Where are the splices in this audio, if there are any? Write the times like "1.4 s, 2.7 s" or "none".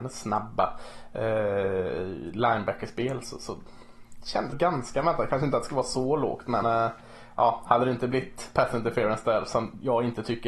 4.5 s, 6.6 s